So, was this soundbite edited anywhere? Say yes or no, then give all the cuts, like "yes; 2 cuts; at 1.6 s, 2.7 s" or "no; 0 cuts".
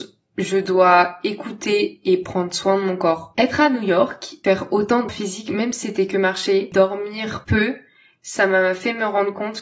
yes; 1 cut; at 5.1 s